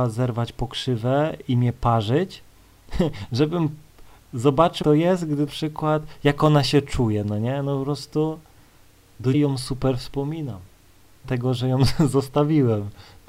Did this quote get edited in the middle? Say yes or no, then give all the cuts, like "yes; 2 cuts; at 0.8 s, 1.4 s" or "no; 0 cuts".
yes; 4 cuts; at 4.8 s, 5.5 s, 9.3 s, 11.2 s